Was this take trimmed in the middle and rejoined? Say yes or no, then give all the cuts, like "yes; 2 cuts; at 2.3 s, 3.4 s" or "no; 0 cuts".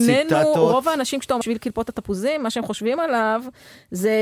yes; 1 cut; at 1.4 s